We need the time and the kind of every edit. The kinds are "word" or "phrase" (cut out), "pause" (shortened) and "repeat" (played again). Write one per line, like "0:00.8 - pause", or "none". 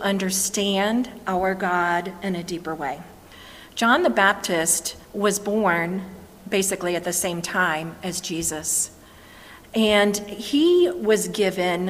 0:05.0 - pause